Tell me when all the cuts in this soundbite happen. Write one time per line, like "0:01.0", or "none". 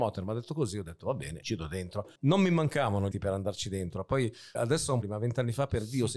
0:01.4
0:02.2
0:03.1
0:04.5
0:05.0